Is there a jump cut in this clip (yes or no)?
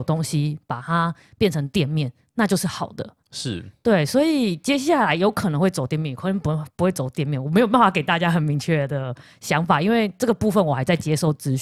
yes